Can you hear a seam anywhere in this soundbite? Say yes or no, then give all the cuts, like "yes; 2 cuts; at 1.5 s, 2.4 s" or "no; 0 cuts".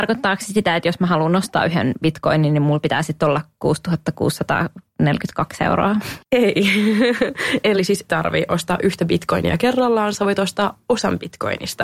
yes; 2 cuts; at 6.3 s, 8.1 s